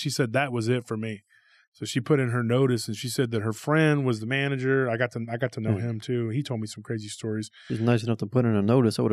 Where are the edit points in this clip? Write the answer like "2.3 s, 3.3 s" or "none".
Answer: none